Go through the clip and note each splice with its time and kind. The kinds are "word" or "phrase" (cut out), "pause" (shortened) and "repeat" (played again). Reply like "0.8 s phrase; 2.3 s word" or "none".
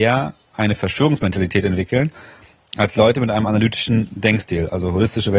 none